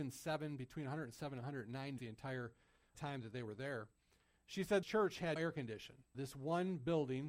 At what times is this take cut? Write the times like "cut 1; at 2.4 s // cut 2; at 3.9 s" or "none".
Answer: cut 1; at 2.0 s // cut 2; at 2.9 s // cut 3; at 4.8 s // cut 4; at 5.4 s // cut 5; at 6.1 s